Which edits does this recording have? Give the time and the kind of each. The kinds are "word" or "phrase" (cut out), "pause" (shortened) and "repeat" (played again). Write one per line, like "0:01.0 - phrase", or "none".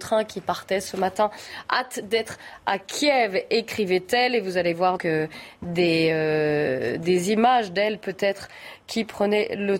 0:05.0 - word